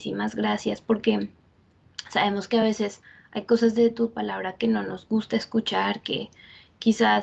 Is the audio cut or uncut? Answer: uncut